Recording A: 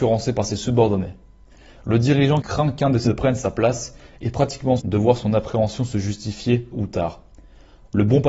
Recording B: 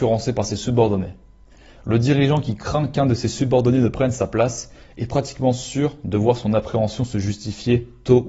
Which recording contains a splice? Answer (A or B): A